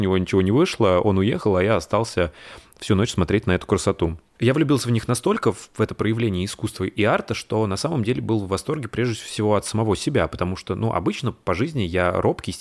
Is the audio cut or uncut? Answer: uncut